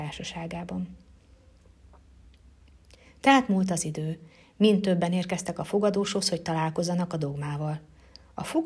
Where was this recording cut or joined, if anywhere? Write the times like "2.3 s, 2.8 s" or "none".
none